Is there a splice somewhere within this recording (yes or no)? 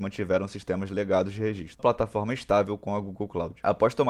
yes